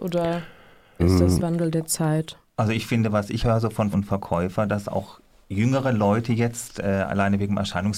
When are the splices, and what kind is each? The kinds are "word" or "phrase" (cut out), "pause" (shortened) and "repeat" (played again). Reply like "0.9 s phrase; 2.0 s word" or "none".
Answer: 1.0 s word; 1.4 s word; 3.4 s word; 3.9 s word